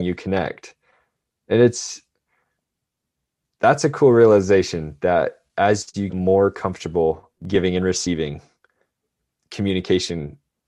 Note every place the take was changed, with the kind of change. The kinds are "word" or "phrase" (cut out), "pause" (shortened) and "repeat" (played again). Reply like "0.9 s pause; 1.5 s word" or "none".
6.1 s word; 7.4 s pause